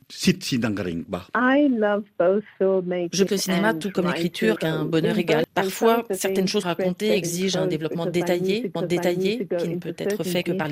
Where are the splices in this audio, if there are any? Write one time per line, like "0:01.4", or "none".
0:03.3
0:04.6
0:06.6
0:08.8